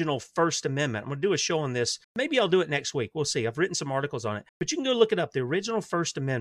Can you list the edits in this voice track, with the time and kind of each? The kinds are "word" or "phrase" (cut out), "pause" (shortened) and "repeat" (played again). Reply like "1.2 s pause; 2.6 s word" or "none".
2.0 s pause; 4.5 s pause